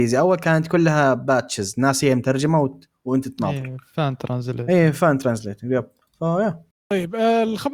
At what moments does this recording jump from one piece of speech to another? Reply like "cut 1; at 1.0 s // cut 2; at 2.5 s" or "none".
none

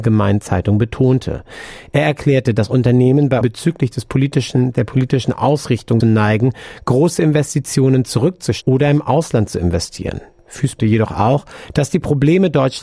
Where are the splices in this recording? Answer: cut 1; at 3.4 s // cut 2; at 6.0 s // cut 3; at 8.6 s // cut 4; at 10.8 s

